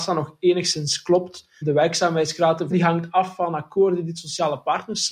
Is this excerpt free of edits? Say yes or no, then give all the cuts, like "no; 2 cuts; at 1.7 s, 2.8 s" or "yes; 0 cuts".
no; 2 cuts; at 1.6 s, 2.7 s